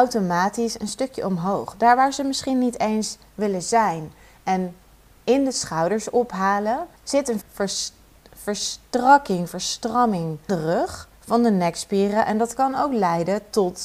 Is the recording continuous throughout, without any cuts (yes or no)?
no